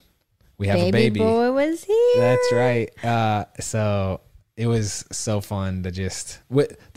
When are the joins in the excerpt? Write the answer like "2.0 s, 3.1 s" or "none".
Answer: none